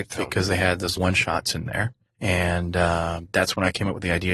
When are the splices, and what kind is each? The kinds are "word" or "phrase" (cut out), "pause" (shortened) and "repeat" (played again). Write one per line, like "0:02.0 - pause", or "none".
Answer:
0:01.0 - word
0:02.1 - pause